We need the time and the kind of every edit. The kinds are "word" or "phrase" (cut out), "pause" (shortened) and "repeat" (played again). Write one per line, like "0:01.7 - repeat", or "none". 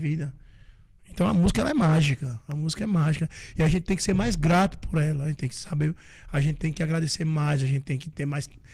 none